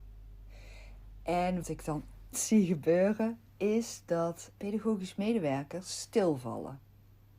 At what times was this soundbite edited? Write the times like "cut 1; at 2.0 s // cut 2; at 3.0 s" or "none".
cut 1; at 1.6 s // cut 2; at 2.3 s // cut 3; at 3.5 s // cut 4; at 4.6 s